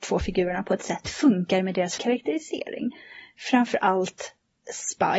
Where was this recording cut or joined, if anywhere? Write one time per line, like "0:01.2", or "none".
0:01.0
0:02.0